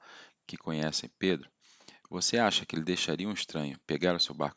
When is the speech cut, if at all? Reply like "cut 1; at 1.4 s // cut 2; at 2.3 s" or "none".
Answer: none